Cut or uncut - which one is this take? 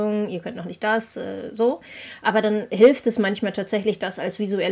uncut